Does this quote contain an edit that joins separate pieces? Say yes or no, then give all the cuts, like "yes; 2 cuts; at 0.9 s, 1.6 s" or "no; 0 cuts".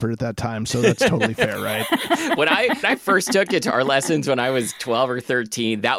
yes; 1 cut; at 2.8 s